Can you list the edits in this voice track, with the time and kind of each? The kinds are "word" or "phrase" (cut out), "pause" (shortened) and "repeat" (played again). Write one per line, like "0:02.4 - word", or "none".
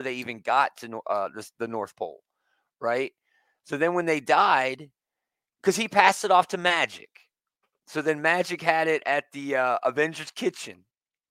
none